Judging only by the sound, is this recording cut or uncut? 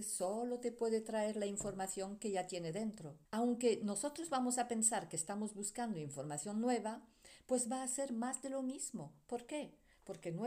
cut